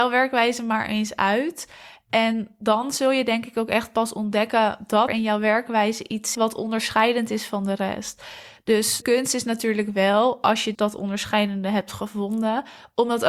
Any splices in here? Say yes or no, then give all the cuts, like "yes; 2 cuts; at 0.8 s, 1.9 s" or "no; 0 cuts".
yes; 4 cuts; at 5.1 s, 6.3 s, 9.0 s, 10.7 s